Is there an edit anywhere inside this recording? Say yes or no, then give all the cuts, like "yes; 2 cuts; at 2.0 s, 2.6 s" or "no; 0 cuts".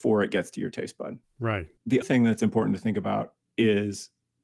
yes; 1 cut; at 2.0 s